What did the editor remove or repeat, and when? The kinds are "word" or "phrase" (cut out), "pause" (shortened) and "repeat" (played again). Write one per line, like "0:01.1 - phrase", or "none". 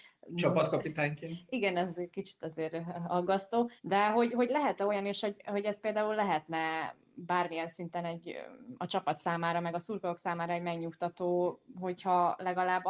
0:03.8 - pause

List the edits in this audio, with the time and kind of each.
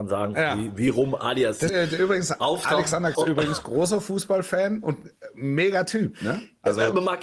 0:01.7 - word
0:03.1 - word

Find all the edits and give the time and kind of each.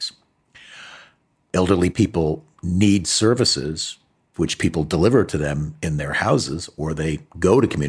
none

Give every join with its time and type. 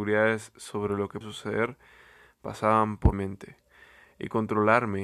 0:01.2 - word
0:03.1 - word

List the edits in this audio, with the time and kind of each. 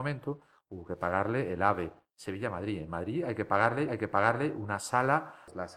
0:03.9 - repeat

